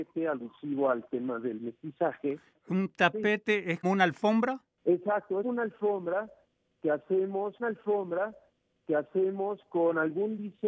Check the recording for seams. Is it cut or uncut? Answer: cut